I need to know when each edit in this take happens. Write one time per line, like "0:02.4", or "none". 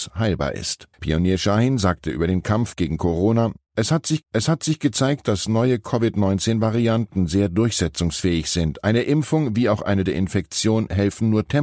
0:00.9
0:04.2
0:10.1